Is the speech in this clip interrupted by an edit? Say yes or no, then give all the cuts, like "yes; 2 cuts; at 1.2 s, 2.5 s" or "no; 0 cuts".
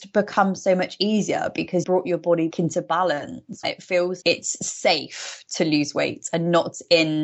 yes; 4 cuts; at 1.8 s, 2.5 s, 3.6 s, 4.2 s